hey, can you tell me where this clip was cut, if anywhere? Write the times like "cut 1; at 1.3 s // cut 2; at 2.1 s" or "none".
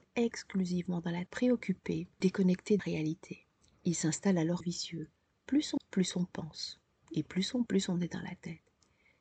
cut 1; at 1.3 s // cut 2; at 2.2 s // cut 3; at 2.8 s // cut 4; at 4.6 s // cut 5; at 5.8 s // cut 6; at 6.9 s // cut 7; at 7.7 s

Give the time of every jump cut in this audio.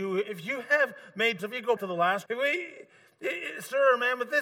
cut 1; at 1.4 s // cut 2; at 1.8 s // cut 3; at 2.3 s

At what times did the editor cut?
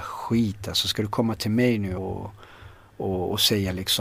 cut 1; at 2.0 s

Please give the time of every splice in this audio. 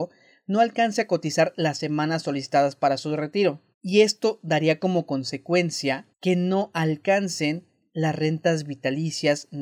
cut 1; at 3.7 s // cut 2; at 6.1 s

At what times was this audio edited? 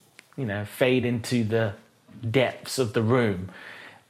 none

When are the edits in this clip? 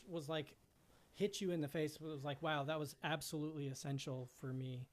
none

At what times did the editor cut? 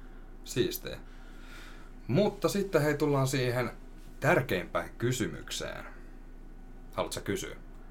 none

